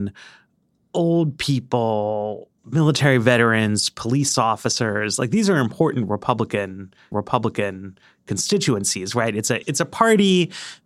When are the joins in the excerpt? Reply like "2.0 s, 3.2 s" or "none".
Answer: 2.6 s, 7.1 s, 9.6 s

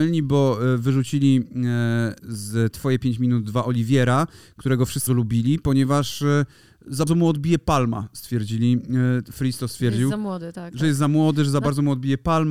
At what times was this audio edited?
2.2 s, 5.1 s, 7.1 s

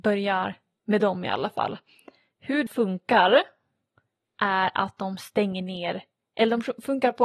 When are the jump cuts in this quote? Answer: 2.7 s

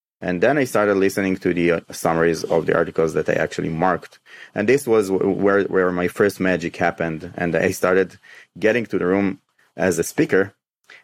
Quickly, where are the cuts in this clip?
none

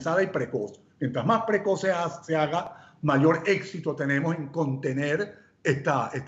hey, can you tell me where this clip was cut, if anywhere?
none

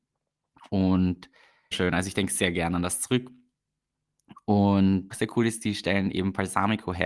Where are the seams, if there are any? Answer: 1.7 s, 5.1 s

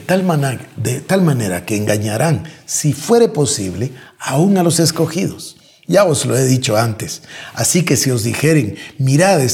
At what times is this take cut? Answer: none

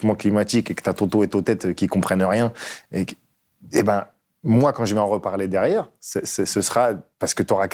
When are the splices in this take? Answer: none

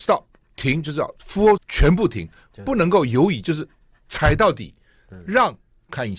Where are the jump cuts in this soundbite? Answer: 1.6 s

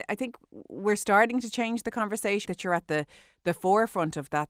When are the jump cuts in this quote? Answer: 2.5 s

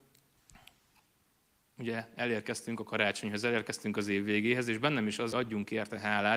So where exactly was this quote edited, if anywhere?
5.3 s

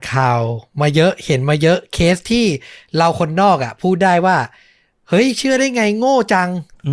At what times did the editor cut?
none

